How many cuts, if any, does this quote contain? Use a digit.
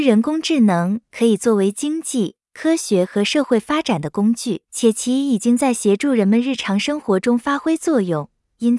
1